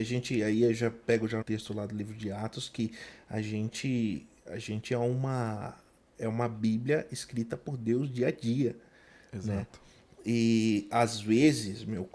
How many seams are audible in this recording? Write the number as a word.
one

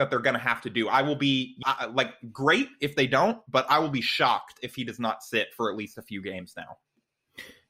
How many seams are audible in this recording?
one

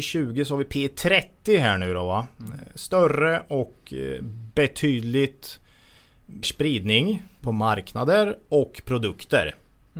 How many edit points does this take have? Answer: one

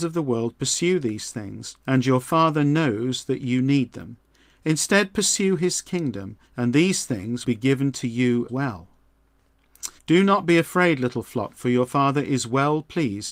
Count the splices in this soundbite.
five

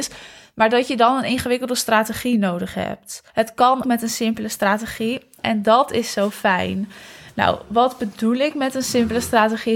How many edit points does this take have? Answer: two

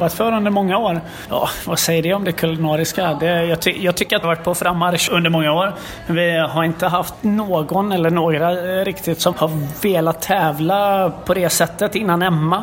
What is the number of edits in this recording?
two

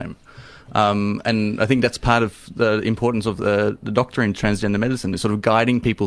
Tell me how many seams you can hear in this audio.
zero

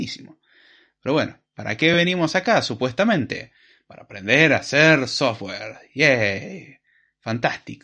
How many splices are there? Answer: zero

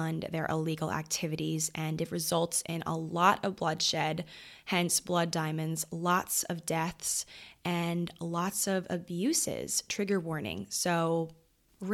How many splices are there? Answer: zero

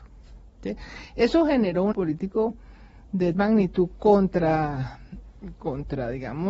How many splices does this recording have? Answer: two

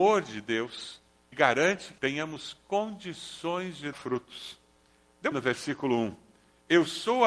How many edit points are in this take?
four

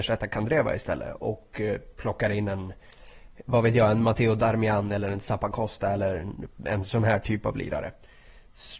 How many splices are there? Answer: zero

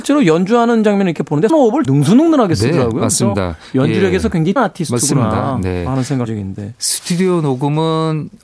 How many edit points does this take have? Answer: four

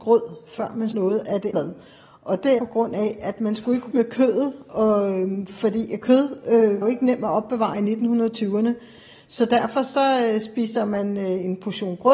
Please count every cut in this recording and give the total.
five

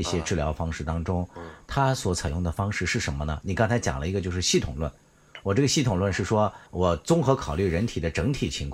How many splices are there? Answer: one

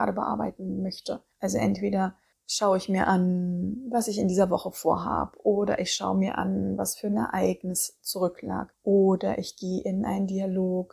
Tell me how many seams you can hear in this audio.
zero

